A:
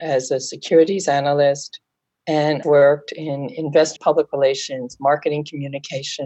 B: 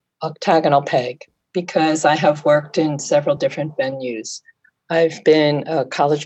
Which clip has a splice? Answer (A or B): A